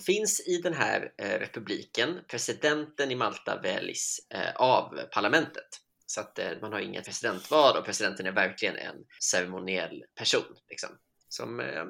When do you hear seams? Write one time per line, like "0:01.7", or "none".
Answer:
0:07.0